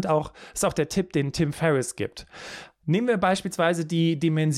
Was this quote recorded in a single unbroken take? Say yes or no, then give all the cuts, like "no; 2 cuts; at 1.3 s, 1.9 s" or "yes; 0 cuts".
yes; 0 cuts